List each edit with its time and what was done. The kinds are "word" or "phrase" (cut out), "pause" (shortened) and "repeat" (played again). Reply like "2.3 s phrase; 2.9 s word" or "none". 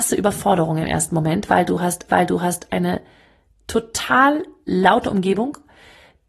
2.1 s repeat